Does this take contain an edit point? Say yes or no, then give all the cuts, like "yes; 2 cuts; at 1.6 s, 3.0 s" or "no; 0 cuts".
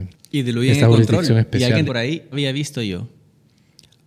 yes; 2 cuts; at 1.9 s, 2.3 s